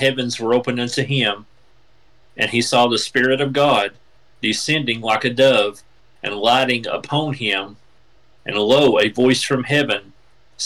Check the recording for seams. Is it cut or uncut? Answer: uncut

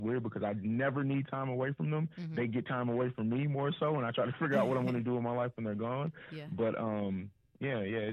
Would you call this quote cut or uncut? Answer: uncut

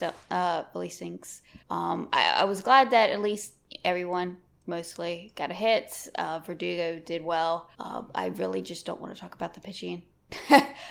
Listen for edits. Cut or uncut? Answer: cut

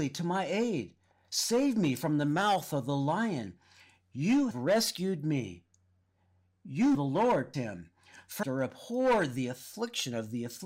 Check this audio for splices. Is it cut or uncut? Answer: cut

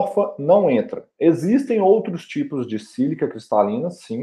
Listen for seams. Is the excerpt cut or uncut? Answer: uncut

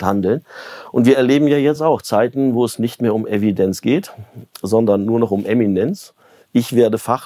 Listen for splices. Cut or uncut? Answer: uncut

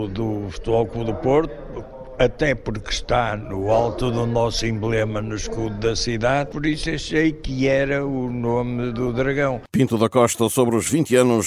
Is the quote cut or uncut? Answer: cut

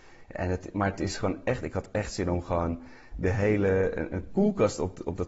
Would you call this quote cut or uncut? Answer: uncut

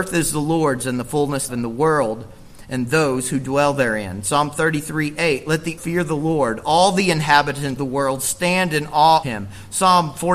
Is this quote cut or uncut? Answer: cut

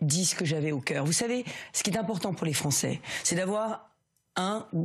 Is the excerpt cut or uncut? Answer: uncut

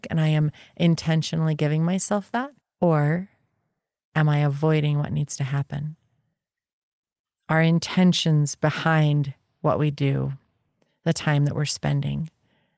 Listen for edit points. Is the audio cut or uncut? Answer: cut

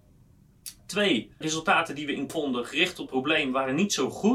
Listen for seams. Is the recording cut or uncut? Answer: cut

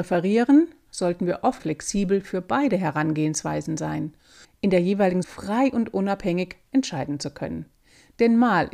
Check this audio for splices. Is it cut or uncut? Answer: cut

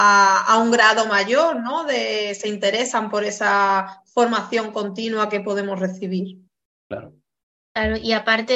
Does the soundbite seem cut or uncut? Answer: uncut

